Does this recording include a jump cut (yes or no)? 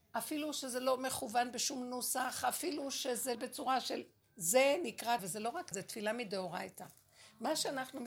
yes